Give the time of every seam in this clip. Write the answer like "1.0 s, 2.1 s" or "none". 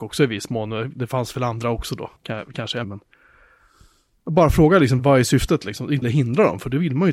2.2 s, 2.8 s, 5.0 s, 6.0 s